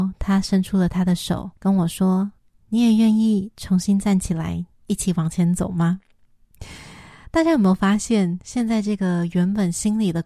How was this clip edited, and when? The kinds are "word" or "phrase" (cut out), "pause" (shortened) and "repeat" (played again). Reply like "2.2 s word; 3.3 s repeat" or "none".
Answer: 1.6 s pause; 2.4 s pause